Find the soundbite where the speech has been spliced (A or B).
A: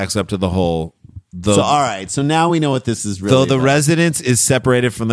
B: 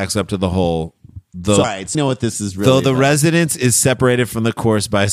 B